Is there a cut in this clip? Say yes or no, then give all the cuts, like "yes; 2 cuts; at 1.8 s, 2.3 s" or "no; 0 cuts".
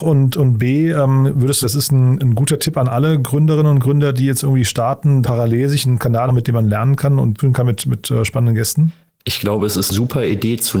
yes; 5 cuts; at 1.6 s, 5.2 s, 6.3 s, 7.4 s, 9.9 s